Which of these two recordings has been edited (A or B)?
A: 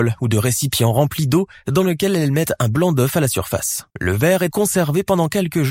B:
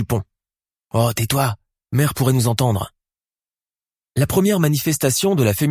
A